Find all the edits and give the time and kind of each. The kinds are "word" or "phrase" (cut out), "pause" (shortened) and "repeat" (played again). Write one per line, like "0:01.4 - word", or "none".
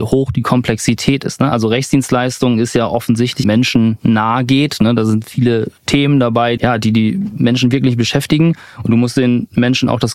0:03.4 - phrase
0:05.8 - pause
0:06.6 - word